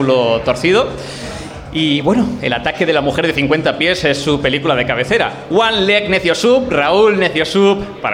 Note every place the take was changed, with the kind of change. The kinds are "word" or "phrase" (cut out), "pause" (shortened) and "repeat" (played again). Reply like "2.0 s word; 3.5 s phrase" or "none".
none